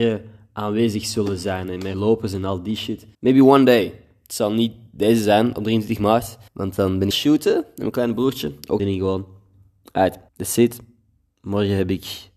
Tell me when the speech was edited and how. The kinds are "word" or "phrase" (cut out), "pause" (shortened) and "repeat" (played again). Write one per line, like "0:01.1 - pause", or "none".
0:01.9 - word
0:03.1 - pause
0:06.5 - pause
0:07.1 - phrase
0:08.8 - phrase
0:10.3 - pause